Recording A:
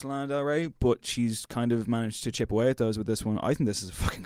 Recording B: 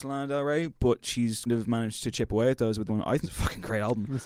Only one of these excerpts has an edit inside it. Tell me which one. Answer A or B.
B